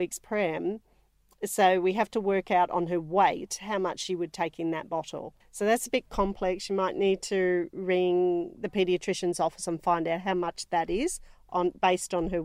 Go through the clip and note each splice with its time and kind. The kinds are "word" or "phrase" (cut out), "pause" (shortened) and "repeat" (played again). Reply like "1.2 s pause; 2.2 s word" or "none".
5.4 s pause